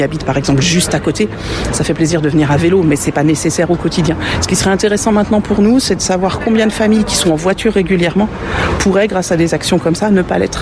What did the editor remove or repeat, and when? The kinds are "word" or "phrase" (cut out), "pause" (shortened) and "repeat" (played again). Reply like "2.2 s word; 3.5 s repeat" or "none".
none